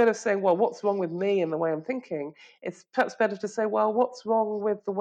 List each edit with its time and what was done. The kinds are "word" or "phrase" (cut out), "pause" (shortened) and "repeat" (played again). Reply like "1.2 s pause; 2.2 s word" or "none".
none